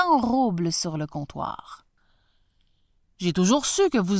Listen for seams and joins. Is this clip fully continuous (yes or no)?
yes